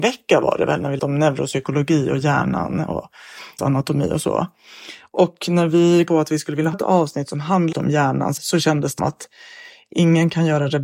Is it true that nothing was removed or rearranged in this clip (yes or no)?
no